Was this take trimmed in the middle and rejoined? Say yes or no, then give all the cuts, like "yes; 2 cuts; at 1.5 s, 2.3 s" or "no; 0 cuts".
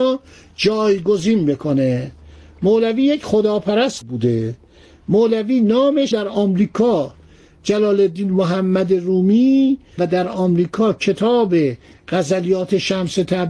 yes; 3 cuts; at 4.0 s, 6.1 s, 10.0 s